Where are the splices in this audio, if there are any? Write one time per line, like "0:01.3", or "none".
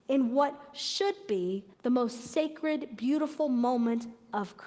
0:01.7